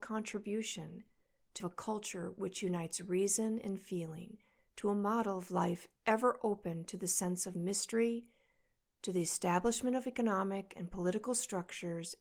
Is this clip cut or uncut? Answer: cut